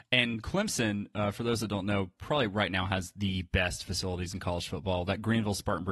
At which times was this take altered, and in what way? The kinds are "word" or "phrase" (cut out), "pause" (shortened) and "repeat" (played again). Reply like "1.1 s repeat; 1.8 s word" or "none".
none